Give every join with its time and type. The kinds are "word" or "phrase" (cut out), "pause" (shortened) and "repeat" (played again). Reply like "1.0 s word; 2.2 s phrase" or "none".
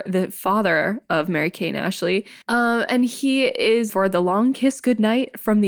2.4 s pause; 3.9 s word